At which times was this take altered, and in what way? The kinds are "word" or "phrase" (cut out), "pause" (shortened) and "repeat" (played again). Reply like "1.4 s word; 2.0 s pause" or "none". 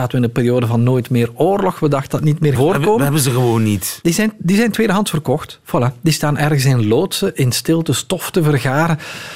2.1 s word; 2.6 s word